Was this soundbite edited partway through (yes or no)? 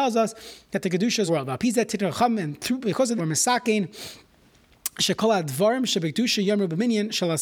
yes